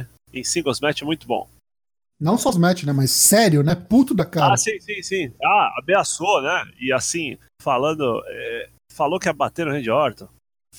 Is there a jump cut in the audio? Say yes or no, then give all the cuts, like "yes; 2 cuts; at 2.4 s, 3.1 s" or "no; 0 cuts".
yes; 2 cuts; at 2.5 s, 7.5 s